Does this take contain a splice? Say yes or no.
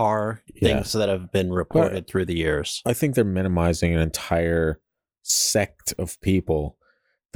no